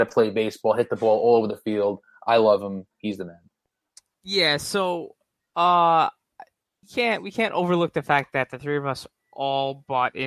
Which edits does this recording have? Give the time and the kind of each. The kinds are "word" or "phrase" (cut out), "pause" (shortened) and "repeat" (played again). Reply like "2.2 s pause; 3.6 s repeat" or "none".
6.8 s word